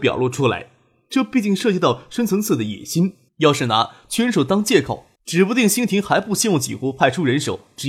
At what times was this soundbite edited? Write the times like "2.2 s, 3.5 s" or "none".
3.3 s, 5.1 s